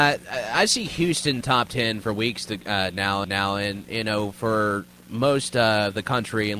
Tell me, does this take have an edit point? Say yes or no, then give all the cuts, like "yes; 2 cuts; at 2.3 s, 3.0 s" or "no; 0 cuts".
yes; 2 cuts; at 1.4 s, 3.2 s